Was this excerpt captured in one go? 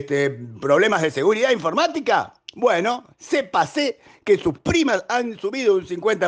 yes; 0 cuts

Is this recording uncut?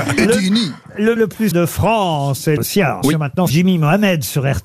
no; 5 cuts; at 1.2 s, 1.5 s, 2.6 s, 3.0 s, 3.5 s

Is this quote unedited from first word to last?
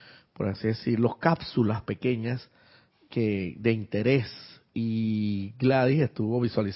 yes; 0 cuts

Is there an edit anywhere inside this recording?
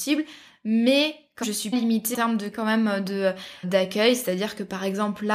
yes; 5 cuts; at 1.4 s, 1.7 s, 2.1 s, 2.5 s, 3.6 s

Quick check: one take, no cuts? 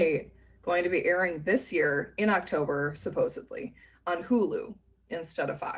yes; 0 cuts

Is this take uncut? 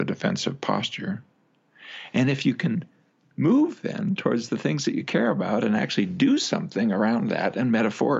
yes; 0 cuts

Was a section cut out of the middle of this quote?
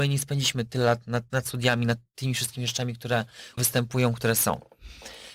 yes; 2 cuts; at 1.3 s, 3.6 s

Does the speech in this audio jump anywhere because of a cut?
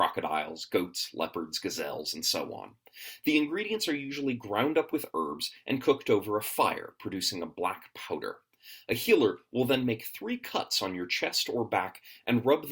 no; 0 cuts

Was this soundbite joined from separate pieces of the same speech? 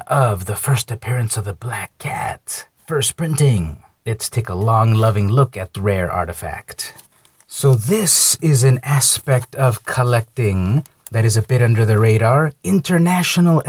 yes; 2 cuts; at 2.8 s, 5.7 s

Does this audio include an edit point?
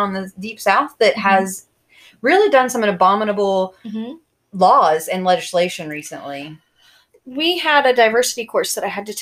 no; 0 cuts

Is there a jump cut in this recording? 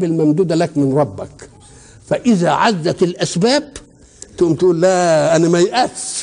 no; 0 cuts

